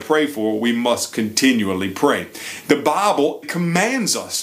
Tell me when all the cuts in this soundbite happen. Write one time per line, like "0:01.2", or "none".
0:03.4